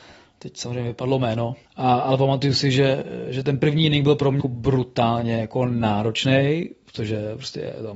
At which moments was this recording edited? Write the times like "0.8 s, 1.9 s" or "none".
1.7 s, 4.4 s

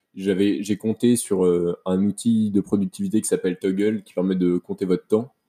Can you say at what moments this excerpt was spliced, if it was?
none

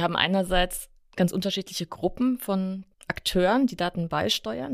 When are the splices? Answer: none

